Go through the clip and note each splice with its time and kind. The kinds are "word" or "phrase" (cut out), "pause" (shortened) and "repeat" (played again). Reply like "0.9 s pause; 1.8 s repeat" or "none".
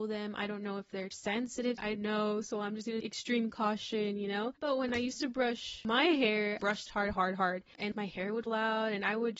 1.9 s word; 3.0 s phrase; 6.6 s phrase; 7.1 s word; 8.5 s word